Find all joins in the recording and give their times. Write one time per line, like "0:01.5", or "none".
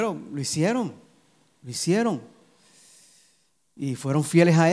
none